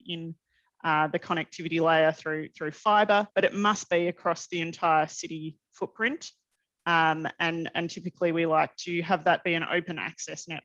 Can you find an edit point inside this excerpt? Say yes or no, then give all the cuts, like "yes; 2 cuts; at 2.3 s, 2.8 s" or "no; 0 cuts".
yes; 1 cut; at 3.3 s